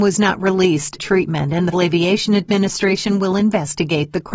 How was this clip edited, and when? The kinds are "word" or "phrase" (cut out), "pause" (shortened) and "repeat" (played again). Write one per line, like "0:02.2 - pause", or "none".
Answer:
0:01.0 - word
0:01.7 - word